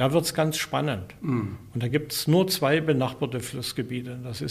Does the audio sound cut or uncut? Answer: uncut